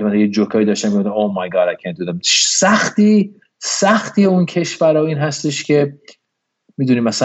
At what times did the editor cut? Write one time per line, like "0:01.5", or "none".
none